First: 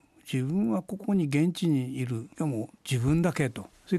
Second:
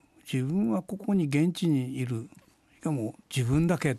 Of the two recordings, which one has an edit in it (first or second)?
first